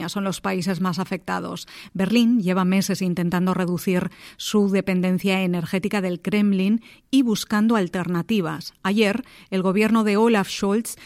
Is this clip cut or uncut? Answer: uncut